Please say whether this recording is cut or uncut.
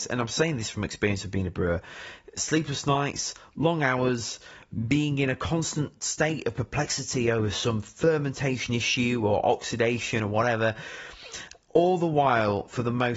uncut